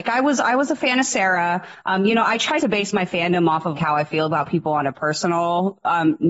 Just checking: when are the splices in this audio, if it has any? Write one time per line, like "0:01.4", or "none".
0:02.6
0:03.7

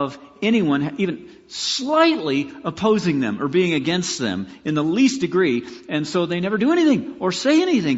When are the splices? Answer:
none

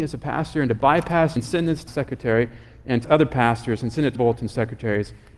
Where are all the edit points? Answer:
0:01.4
0:01.9
0:03.0
0:04.1

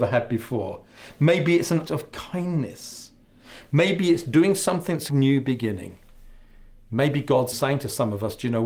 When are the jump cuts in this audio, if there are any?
0:01.8
0:04.2
0:05.1
0:07.5

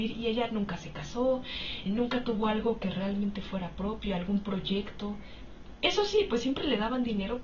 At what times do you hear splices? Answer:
0:01.9

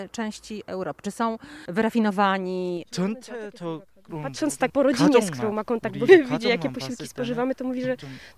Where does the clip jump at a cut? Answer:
0:04.7
0:06.1

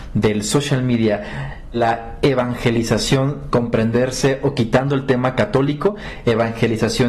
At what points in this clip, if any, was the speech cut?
0:01.7
0:03.5

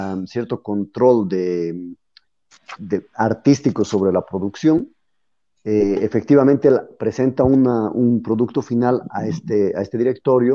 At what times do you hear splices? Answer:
0:02.8

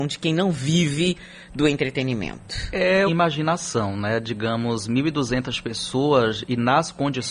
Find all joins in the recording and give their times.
0:03.1

